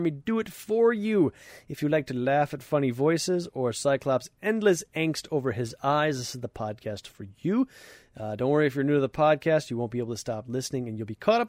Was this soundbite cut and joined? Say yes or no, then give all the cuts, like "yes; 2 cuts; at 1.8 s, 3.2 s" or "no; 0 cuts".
no; 0 cuts